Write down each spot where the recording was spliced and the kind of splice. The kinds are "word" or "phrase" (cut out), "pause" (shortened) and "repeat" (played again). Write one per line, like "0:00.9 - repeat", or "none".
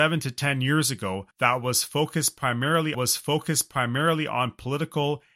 0:01.3 - pause
0:02.9 - repeat